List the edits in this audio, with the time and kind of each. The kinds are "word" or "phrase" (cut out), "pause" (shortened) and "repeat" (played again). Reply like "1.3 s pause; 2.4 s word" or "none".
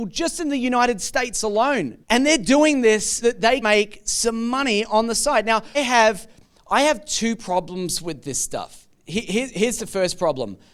2.0 s pause; 3.2 s word; 3.6 s word; 5.7 s word